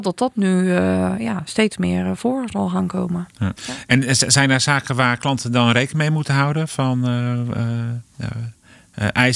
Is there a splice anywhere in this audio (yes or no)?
yes